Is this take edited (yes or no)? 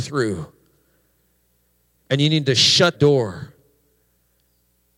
yes